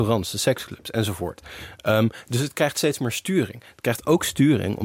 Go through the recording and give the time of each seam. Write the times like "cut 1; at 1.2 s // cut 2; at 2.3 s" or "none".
none

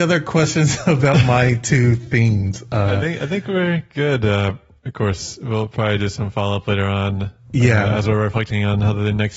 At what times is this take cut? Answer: none

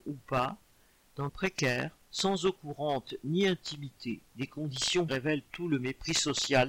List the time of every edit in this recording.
cut 1; at 1.3 s // cut 2; at 2.0 s // cut 3; at 4.3 s // cut 4; at 5.1 s

